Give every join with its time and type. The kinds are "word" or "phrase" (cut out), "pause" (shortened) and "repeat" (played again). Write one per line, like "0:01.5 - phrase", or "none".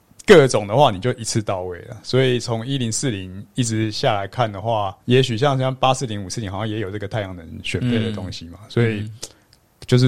0:05.0 - pause

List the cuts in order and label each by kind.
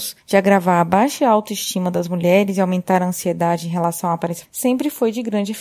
0:04.4 - word

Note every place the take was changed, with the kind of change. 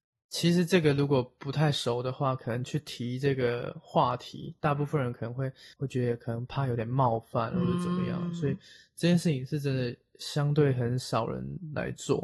0:05.7 - pause

